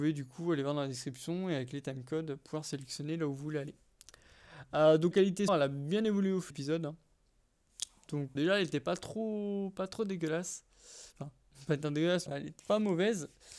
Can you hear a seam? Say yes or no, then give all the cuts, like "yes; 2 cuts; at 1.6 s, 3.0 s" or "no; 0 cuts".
yes; 6 cuts; at 5.1 s, 5.5 s, 6.5 s, 8.3 s, 12.3 s, 12.6 s